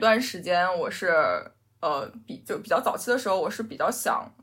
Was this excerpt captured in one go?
yes; 0 cuts

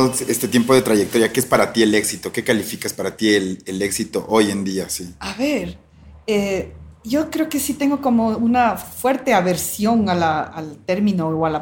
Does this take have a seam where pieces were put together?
no; 0 cuts

